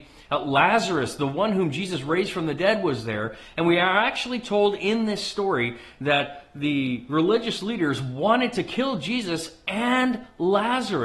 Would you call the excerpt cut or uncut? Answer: uncut